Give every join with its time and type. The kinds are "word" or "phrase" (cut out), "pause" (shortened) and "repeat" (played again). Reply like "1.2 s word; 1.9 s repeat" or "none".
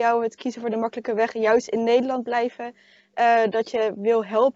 none